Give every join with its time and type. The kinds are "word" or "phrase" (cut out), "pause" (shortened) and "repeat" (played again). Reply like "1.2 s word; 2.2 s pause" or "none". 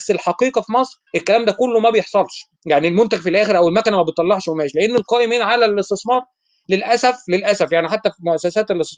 1.1 s pause; 2.5 s pause